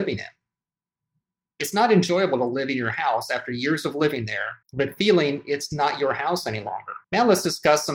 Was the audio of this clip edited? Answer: yes; 2 cuts; at 4.6 s, 7.0 s

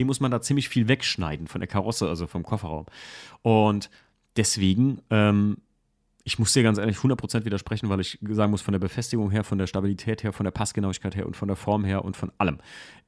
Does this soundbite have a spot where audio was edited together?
no; 0 cuts

